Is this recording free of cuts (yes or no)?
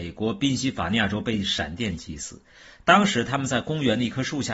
yes